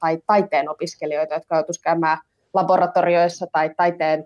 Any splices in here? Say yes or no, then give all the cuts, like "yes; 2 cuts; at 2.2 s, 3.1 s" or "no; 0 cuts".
no; 0 cuts